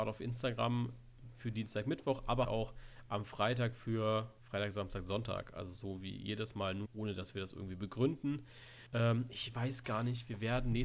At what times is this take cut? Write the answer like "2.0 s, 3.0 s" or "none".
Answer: 2.4 s, 4.4 s, 6.9 s, 8.9 s

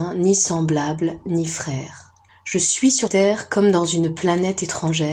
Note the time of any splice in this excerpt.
2.3 s, 3.1 s

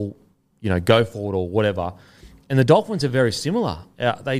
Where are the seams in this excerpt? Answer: none

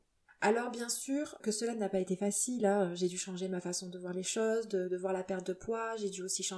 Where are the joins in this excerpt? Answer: 1.4 s

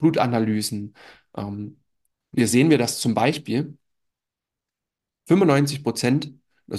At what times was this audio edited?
none

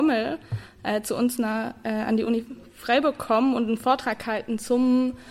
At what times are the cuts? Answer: none

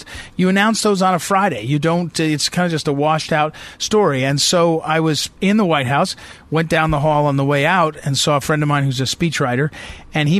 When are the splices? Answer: 5.4 s

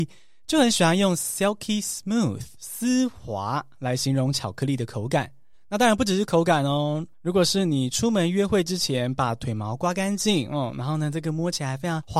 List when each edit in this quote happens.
2.5 s, 5.5 s

